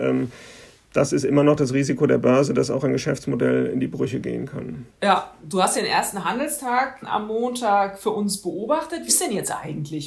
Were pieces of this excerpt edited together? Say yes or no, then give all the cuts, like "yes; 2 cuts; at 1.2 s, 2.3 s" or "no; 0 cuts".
yes; 4 cuts; at 4.9 s, 5.8 s, 7.0 s, 9.1 s